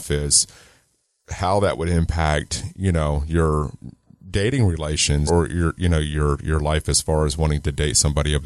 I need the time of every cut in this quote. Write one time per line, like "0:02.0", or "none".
0:05.3